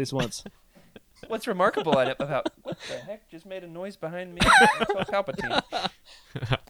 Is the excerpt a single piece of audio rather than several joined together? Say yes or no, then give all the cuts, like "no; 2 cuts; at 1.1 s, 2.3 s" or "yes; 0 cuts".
no; 2 cuts; at 1.3 s, 5.1 s